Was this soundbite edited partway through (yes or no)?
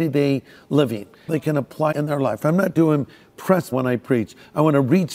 yes